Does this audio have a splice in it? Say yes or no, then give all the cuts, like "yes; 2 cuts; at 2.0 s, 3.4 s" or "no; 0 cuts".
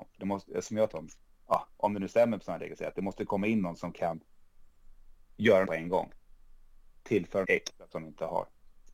yes; 3 cuts; at 0.9 s, 5.6 s, 7.4 s